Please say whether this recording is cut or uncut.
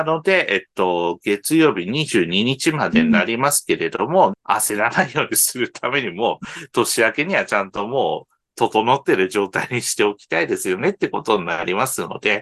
cut